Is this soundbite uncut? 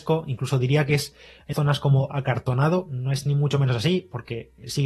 no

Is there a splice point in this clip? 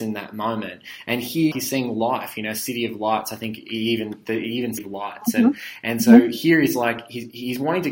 yes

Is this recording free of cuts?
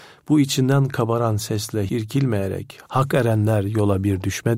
no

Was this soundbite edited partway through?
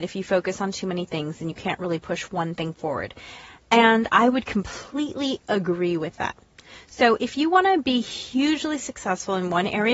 no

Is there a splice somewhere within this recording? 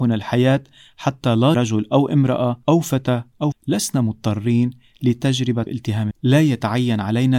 yes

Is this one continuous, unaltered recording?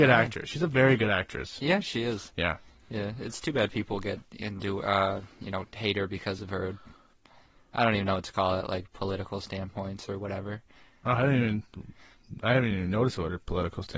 yes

